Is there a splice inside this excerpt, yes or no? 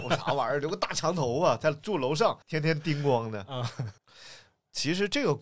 yes